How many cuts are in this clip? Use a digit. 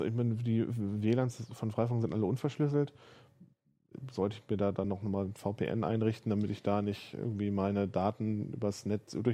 0